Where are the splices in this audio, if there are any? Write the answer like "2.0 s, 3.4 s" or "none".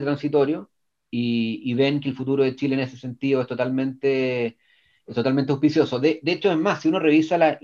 none